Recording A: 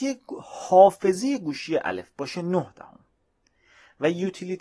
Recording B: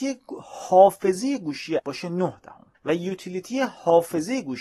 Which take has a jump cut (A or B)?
B